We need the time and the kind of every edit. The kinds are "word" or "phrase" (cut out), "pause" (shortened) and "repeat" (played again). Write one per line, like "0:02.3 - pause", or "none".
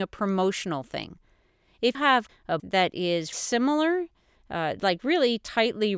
0:01.9 - word
0:02.3 - word
0:02.6 - word
0:03.3 - word

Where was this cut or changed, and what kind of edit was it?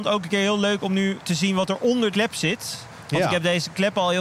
0:02.1 - word

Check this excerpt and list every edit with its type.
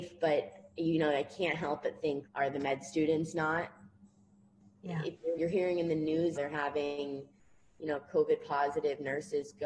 0:02.3 - word
0:05.4 - phrase
0:06.4 - word

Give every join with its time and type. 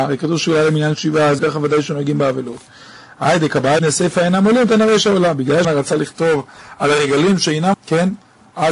0:01.4 - word
0:03.8 - word
0:05.6 - word
0:07.7 - word

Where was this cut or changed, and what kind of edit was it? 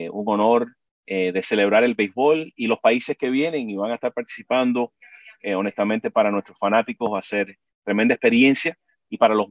none

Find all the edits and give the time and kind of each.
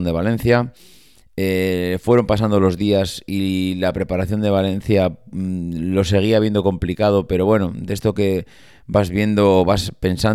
none

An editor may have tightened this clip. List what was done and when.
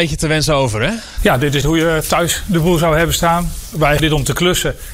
0:01.6 - word
0:04.0 - word

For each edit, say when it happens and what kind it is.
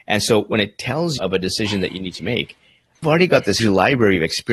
0:01.2 - word
0:03.0 - word
0:03.6 - word

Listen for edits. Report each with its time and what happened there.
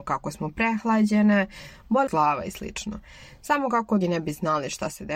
0:02.1 - word
0:04.0 - word

